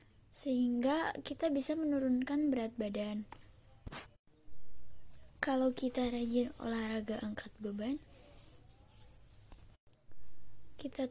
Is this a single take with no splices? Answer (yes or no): yes